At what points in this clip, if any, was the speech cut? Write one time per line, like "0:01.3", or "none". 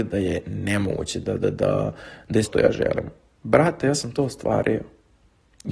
0:02.4